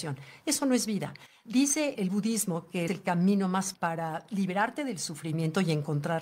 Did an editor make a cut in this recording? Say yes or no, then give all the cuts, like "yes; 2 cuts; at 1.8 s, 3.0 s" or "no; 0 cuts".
yes; 2 cuts; at 2.9 s, 3.7 s